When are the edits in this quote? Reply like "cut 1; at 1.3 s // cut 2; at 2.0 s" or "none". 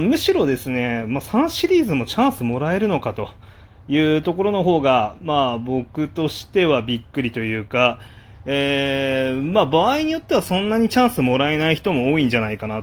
none